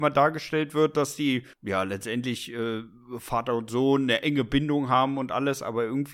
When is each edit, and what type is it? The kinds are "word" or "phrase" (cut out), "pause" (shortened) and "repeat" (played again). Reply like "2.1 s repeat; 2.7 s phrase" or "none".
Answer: 1.5 s pause